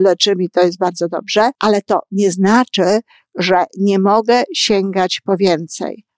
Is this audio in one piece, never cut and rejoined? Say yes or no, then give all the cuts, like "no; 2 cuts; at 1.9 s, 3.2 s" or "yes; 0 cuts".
no; 1 cut; at 1.5 s